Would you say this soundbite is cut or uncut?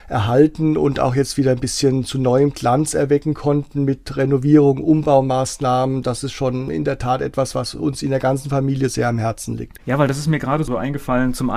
uncut